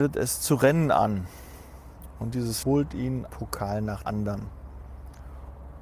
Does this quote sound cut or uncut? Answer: cut